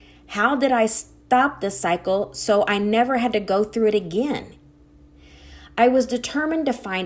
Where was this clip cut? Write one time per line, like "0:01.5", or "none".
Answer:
none